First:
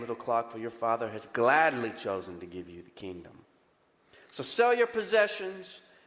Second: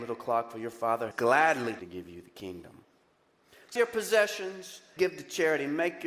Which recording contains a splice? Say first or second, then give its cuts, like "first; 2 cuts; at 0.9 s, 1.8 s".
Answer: second; 4 cuts; at 1.1 s, 1.8 s, 3.8 s, 5.0 s